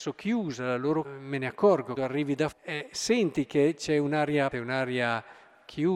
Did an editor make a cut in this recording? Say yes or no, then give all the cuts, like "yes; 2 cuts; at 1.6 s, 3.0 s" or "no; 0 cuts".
yes; 4 cuts; at 1.0 s, 2.0 s, 2.5 s, 4.5 s